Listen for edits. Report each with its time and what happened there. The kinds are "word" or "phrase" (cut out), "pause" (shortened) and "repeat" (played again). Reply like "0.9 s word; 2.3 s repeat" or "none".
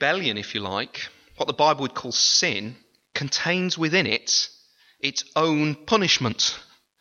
none